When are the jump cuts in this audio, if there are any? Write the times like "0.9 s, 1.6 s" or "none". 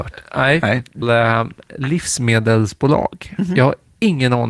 1.0 s